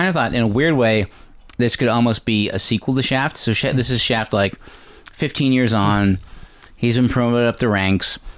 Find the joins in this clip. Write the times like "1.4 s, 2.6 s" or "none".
none